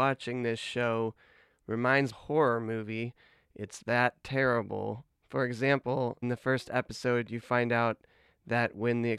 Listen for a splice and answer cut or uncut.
cut